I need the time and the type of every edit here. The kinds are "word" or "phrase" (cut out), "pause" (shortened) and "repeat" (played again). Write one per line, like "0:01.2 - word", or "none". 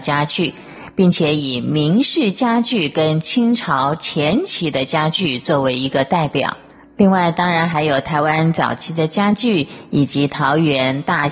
none